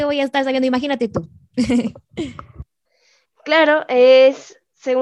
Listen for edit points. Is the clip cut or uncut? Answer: uncut